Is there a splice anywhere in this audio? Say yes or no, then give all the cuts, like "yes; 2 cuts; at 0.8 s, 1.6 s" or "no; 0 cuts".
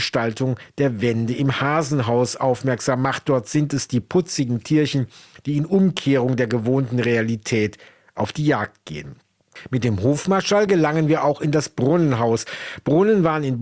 no; 0 cuts